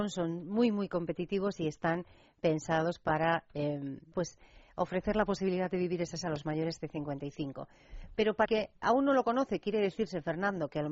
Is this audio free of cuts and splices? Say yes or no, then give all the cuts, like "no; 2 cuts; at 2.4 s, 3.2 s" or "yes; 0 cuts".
no; 4 cuts; at 4.1 s, 6.2 s, 8.5 s, 8.8 s